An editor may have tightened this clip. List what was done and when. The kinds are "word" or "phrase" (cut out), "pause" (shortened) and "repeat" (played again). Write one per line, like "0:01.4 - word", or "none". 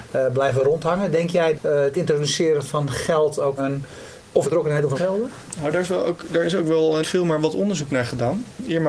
0:01.5 - word
0:03.6 - word
0:04.4 - phrase
0:04.9 - phrase
0:07.0 - word